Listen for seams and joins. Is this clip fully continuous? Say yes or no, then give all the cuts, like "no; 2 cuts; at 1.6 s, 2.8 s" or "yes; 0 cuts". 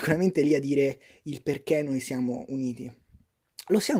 yes; 0 cuts